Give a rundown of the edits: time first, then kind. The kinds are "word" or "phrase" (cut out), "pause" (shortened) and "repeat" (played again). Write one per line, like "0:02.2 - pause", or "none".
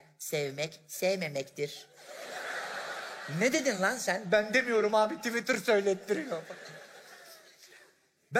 none